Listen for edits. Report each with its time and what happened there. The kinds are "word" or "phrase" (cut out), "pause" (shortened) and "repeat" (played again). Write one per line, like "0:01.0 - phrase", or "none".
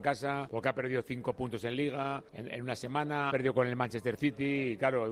0:02.3 - pause
0:03.3 - word